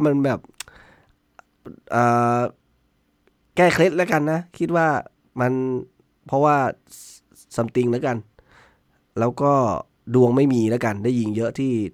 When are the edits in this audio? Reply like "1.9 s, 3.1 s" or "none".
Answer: none